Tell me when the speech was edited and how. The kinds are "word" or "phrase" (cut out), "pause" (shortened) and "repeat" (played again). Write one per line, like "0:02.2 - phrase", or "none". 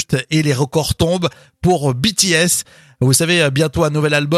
none